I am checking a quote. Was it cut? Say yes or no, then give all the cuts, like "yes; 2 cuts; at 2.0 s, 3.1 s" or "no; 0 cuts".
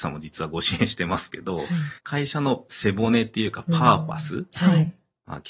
yes; 1 cut; at 2.0 s